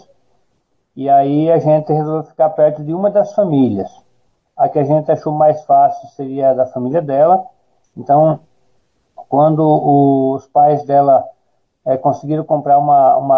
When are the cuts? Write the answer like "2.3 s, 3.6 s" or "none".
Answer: none